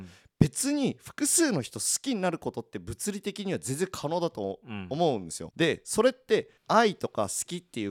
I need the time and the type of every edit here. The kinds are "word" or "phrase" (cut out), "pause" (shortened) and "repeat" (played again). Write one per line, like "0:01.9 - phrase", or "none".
0:05.5 - phrase
0:06.6 - pause